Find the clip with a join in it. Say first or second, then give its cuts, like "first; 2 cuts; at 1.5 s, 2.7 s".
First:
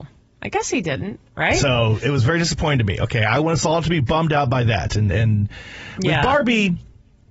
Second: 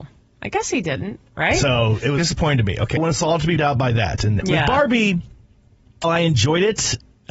second; 5 cuts; at 2.2 s, 3.0 s, 3.6 s, 4.4 s, 6.0 s